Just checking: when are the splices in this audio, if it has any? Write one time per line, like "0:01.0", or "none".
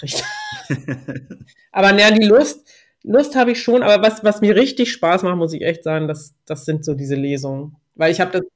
none